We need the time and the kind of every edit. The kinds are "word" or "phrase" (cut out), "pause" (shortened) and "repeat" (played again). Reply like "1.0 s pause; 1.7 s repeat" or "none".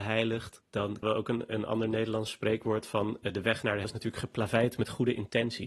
1.0 s word; 3.8 s word